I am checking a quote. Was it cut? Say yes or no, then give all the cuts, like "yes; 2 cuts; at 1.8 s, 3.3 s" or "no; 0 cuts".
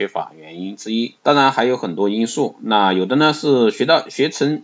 yes; 1 cut; at 1.2 s